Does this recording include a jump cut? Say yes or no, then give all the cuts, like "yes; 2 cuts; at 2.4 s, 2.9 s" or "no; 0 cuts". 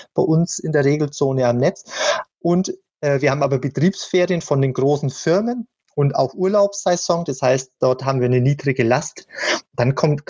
no; 0 cuts